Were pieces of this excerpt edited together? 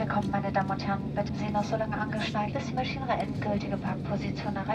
yes; 2 cuts; at 1.3 s, 2.5 s

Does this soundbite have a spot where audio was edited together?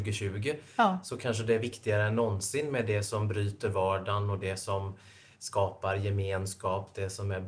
no; 0 cuts

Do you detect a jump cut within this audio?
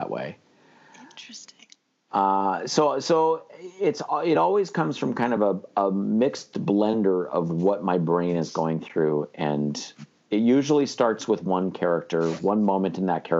no; 0 cuts

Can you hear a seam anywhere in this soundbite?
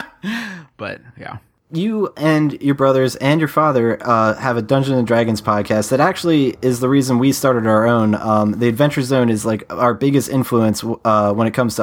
no; 0 cuts

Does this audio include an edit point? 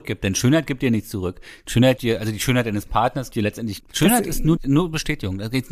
yes; 4 cuts; at 2.0 s, 3.3 s, 3.8 s, 4.6 s

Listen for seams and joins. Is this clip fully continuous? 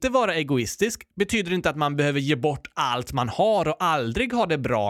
yes; 0 cuts

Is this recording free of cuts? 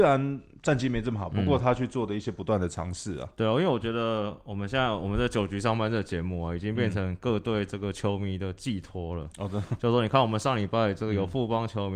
yes; 0 cuts

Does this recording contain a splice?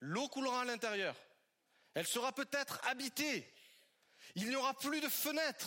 no; 0 cuts

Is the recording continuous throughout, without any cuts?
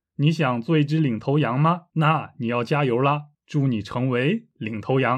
no; 2 cuts; at 1.9 s, 3.3 s

